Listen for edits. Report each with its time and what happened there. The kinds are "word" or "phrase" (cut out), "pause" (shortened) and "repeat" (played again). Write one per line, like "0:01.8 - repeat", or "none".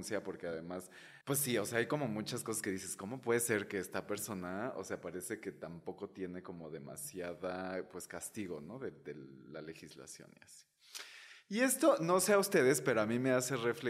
0:01.2 - pause